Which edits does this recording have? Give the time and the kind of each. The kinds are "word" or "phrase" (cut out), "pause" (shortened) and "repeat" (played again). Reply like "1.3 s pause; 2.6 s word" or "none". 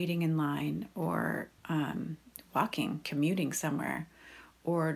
1.6 s pause; 3.0 s word